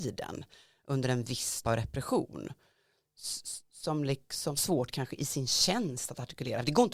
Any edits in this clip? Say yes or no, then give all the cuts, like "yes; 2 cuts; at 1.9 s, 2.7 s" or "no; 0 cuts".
yes; 2 cuts; at 1.6 s, 4.6 s